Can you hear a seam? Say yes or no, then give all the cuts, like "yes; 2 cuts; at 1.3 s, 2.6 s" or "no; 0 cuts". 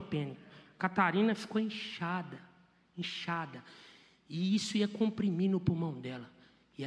no; 0 cuts